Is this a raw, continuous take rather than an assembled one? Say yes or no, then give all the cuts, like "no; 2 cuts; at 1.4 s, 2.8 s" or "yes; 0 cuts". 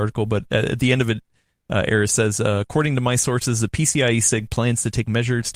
yes; 0 cuts